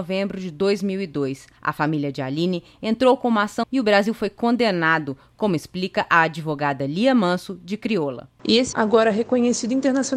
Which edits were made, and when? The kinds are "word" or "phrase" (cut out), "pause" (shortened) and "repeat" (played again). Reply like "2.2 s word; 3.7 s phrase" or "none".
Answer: 1.6 s pause; 3.6 s word; 8.4 s pause; 8.7 s word